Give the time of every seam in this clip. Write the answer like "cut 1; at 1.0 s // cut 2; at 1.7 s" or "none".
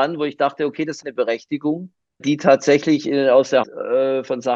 cut 1; at 1.0 s // cut 2; at 2.2 s // cut 3; at 3.6 s